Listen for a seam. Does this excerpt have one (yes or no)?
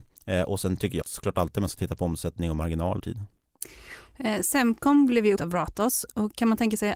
yes